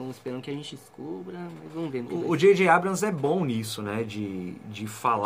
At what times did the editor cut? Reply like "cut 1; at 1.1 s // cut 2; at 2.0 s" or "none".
none